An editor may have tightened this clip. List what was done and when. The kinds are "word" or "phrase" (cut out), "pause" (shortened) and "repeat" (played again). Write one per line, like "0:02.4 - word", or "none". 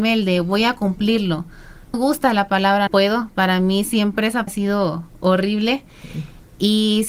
0:01.9 - phrase
0:02.9 - word
0:04.5 - word

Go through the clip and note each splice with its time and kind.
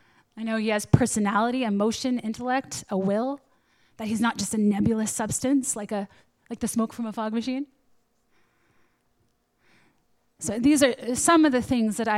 none

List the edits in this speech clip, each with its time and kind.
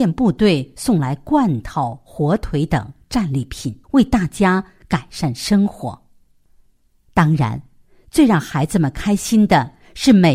0:03.8 - pause

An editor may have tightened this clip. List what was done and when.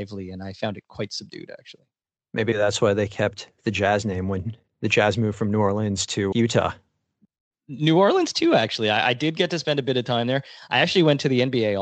0:06.3 - word

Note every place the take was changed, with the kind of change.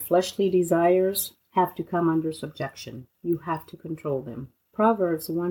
0:03.1 - pause
0:04.6 - pause

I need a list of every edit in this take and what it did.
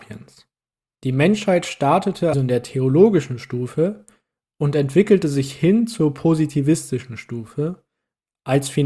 0:02.3 - word

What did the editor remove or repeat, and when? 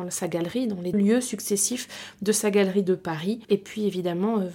0:00.9 - word
0:03.4 - pause

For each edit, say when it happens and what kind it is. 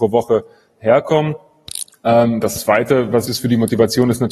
0:01.9 - pause
0:03.3 - word

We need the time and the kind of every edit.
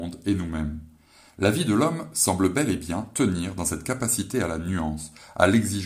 none

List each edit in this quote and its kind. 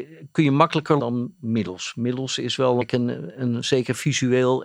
0:01.0 - word
0:02.8 - phrase

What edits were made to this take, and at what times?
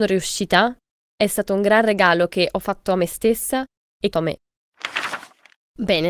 0:04.1 - phrase

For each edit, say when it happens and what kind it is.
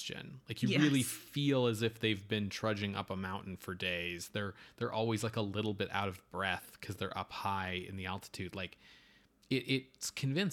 none

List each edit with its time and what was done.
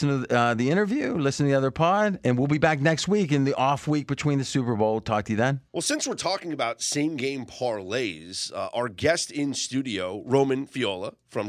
0:05.7 - pause

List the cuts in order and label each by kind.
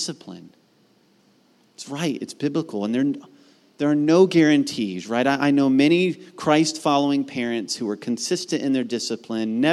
none

